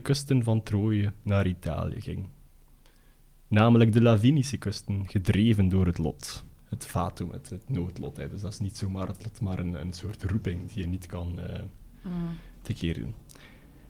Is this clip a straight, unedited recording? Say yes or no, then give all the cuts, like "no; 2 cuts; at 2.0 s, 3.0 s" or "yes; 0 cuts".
yes; 0 cuts